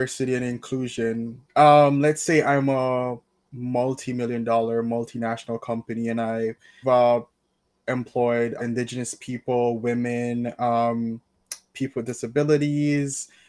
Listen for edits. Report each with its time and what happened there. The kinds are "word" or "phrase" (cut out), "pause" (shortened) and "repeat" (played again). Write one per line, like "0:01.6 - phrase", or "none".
0:01.5 - pause
0:06.8 - word
0:08.6 - word